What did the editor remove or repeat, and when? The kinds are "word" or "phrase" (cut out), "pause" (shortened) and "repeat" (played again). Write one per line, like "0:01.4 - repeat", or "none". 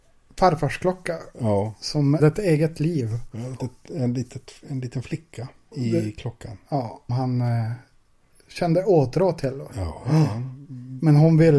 0:02.2 - word
0:03.6 - word
0:04.6 - pause
0:05.7 - word
0:07.1 - word